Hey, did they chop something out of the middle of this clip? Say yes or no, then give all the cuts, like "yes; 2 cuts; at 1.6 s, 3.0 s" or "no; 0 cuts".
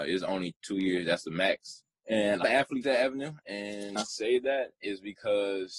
yes; 3 cuts; at 2.4 s, 2.8 s, 4.0 s